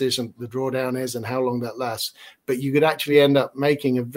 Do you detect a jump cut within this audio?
no; 0 cuts

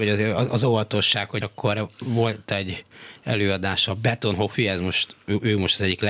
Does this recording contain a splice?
yes; 1 cut; at 1.4 s

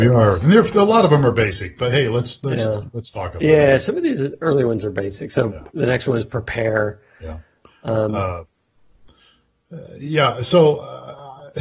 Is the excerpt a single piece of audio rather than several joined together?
yes; 0 cuts

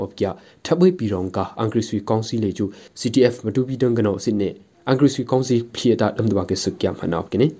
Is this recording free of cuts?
yes; 0 cuts

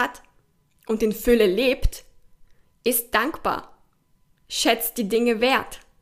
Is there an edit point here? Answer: no; 0 cuts

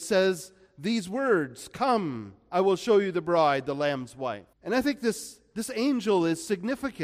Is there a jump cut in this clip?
yes; 1 cut; at 4.5 s

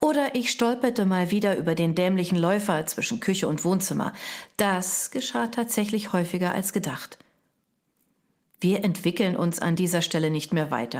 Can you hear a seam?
no; 0 cuts

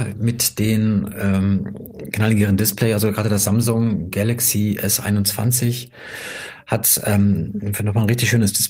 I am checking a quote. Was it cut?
no; 0 cuts

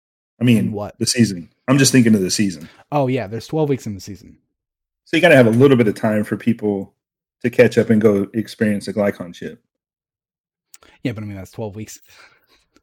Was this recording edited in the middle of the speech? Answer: no; 0 cuts

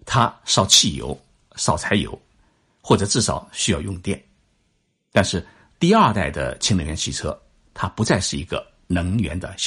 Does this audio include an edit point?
no; 0 cuts

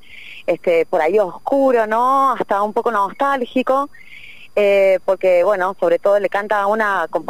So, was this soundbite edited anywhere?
no; 0 cuts

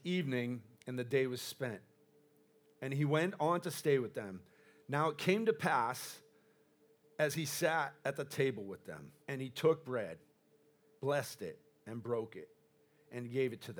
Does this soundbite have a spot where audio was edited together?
yes; 1 cut; at 9.2 s

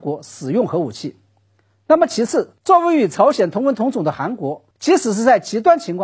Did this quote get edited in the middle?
yes; 2 cuts; at 2.6 s, 4.7 s

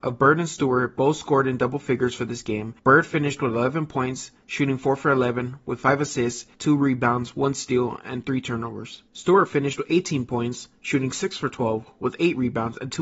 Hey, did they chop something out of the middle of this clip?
yes; 3 cuts; at 2.8 s, 6.5 s, 9.1 s

